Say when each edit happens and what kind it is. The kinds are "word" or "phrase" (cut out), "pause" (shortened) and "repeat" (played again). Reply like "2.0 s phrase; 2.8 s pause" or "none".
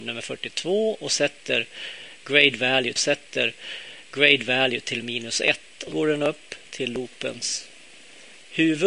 3.0 s repeat; 5.9 s word; 6.7 s pause